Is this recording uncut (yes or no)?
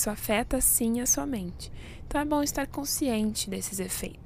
yes